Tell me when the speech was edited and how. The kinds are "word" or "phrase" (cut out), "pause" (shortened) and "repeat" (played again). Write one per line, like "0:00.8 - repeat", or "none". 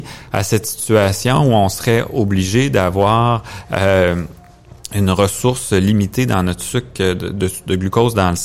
none